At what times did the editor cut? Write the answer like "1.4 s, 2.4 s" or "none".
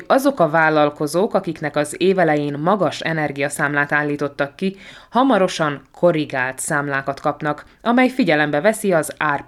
none